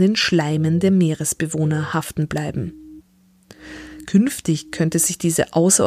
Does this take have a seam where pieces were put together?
no; 0 cuts

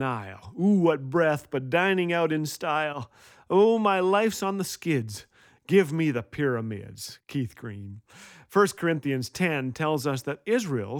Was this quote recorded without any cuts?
yes; 0 cuts

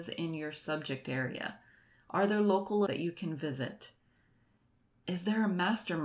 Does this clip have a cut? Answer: yes; 1 cut; at 2.9 s

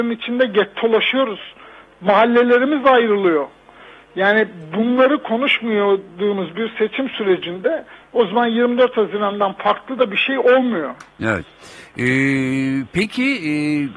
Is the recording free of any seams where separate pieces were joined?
yes; 0 cuts

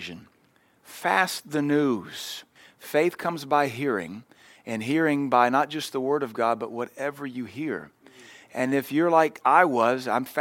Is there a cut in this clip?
no; 0 cuts

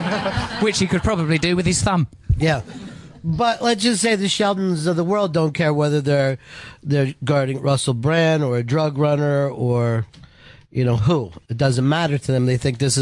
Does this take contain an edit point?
no; 0 cuts

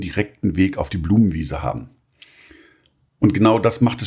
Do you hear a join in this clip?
no; 0 cuts

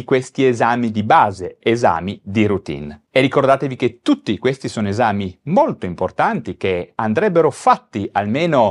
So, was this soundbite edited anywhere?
no; 0 cuts

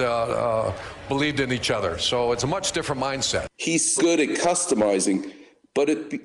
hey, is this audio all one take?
no; 1 cut; at 4.0 s

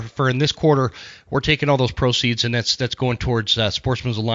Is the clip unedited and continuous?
yes; 0 cuts

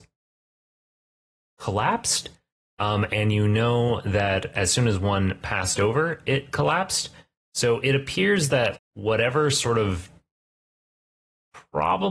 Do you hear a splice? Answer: yes; 1 cut; at 8.8 s

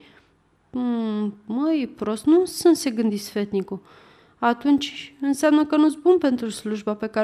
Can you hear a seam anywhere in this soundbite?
no; 0 cuts

